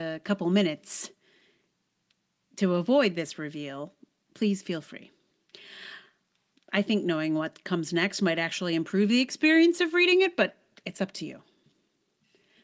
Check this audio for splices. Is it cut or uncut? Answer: uncut